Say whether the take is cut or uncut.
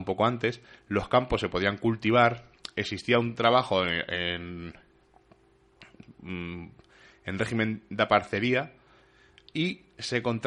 uncut